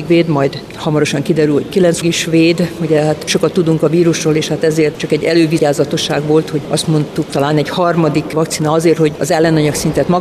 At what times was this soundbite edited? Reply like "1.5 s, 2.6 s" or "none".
2.0 s, 3.3 s, 7.3 s